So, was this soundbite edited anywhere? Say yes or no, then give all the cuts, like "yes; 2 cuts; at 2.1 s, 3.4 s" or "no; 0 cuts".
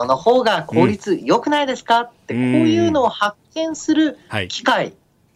no; 0 cuts